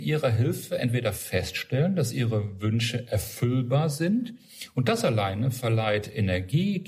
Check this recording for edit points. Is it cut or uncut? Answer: uncut